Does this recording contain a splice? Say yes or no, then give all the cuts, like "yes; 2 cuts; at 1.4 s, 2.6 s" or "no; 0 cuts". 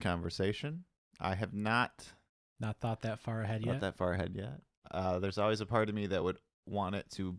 no; 0 cuts